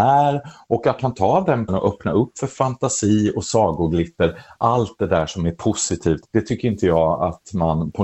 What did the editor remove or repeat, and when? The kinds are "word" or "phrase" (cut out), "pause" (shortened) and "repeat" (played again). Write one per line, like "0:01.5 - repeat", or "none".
0:01.0 - word
0:01.7 - word
0:06.3 - pause